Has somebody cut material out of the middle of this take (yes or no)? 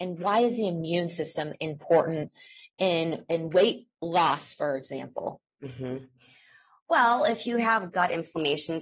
no